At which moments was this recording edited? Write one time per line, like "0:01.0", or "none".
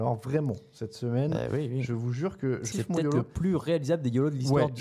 0:02.7